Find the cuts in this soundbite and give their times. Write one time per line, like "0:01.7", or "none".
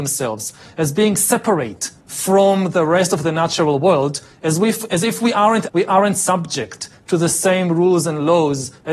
0:02.0
0:05.7